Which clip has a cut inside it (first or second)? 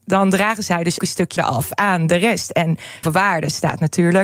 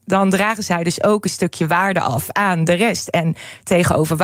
first